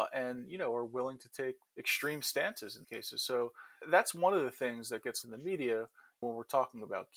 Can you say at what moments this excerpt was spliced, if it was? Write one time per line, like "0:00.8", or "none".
0:01.7
0:02.8
0:03.8
0:05.2
0:06.2